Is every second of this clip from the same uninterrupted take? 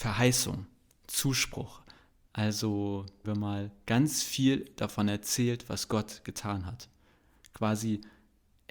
no; 1 cut; at 3.2 s

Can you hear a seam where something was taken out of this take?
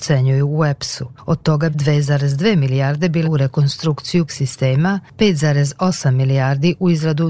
yes; 3 cuts; at 1.7 s, 3.2 s, 4.3 s

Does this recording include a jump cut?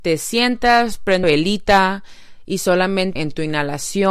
yes; 2 cuts; at 1.2 s, 3.2 s

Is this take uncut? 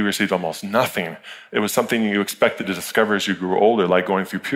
yes; 0 cuts

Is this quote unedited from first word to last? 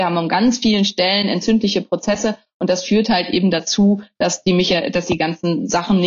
yes; 0 cuts

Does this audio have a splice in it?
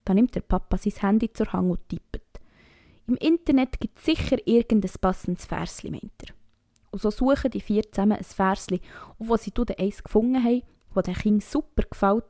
no; 0 cuts

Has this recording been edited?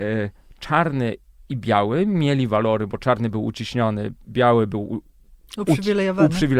no; 0 cuts

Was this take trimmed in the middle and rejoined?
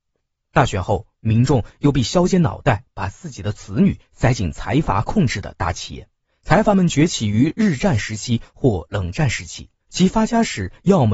yes; 2 cuts; at 6.2 s, 9.8 s

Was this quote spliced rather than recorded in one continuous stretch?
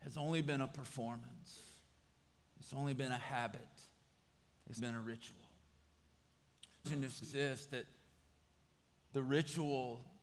yes; 3 cuts; at 4.8 s, 6.8 s, 7.2 s

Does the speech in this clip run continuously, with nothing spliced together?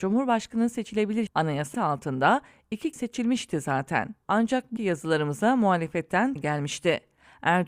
no; 6 cuts; at 1.3 s, 1.7 s, 2.9 s, 4.2 s, 4.8 s, 6.4 s

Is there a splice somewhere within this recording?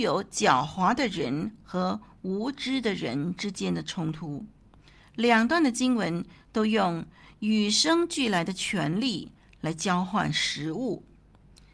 no; 0 cuts

